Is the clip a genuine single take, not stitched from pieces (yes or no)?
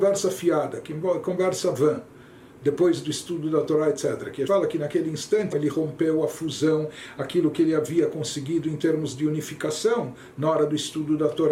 no